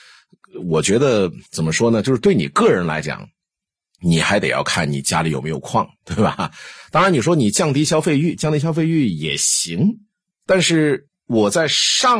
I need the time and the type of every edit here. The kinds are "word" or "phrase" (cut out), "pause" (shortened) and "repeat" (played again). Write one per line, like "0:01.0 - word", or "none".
0:01.5 - pause
0:11.2 - pause